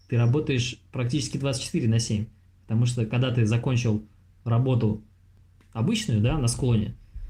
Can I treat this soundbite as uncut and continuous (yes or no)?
yes